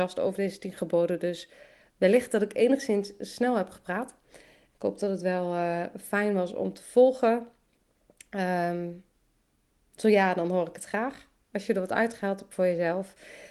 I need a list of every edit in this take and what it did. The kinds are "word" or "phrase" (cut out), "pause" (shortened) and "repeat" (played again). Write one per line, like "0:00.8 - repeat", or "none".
none